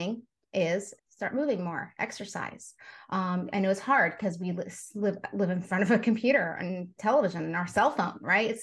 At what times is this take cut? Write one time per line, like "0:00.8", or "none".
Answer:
0:01.0